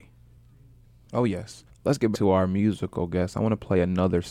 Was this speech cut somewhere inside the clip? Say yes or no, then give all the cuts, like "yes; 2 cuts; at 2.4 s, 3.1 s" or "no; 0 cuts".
yes; 2 cuts; at 1.7 s, 2.1 s